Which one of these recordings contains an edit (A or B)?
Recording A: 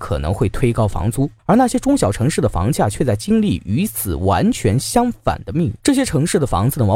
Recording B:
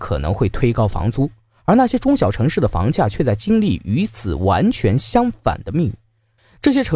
A